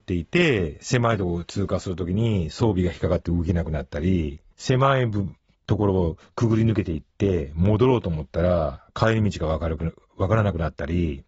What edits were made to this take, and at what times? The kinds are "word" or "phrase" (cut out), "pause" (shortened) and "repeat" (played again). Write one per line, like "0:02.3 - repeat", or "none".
0:04.5 - pause